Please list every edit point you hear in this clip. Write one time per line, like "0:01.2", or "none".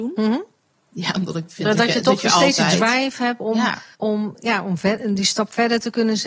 0:03.9